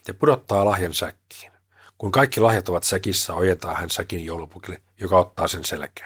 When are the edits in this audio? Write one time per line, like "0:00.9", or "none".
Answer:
none

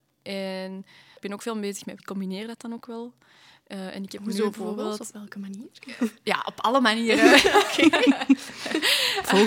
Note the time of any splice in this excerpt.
0:01.2
0:02.0

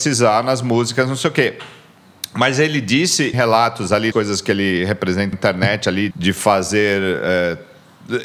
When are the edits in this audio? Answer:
0:03.3
0:04.1
0:05.3
0:06.1

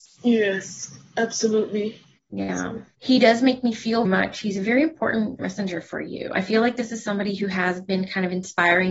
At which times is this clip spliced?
0:02.2
0:02.9
0:04.0
0:05.4

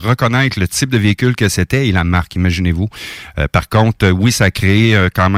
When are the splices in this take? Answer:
none

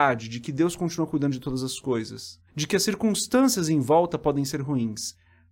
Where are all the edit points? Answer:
0:02.5

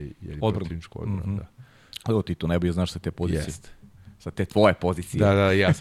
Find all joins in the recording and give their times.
none

